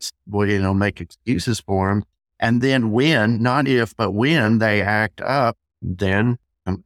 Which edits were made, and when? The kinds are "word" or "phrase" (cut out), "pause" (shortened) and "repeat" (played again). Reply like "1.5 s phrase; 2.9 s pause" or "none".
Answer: none